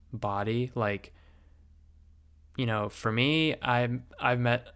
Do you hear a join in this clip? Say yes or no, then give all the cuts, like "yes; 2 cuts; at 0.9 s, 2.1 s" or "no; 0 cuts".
no; 0 cuts